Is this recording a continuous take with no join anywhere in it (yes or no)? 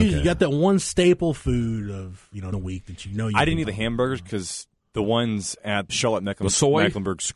no